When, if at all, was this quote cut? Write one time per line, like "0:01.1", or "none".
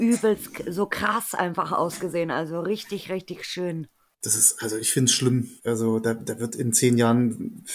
0:04.1
0:05.6